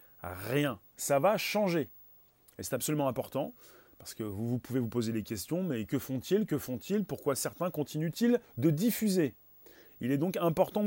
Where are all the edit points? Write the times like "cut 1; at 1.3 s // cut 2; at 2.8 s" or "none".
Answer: cut 1; at 8.4 s